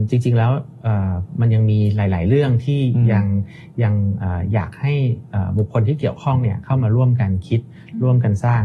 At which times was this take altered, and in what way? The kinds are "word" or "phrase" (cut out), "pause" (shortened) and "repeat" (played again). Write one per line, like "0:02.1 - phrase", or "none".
none